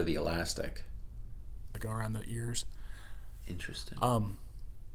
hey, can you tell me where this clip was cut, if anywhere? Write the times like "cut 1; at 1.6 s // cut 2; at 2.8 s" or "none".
cut 1; at 1.7 s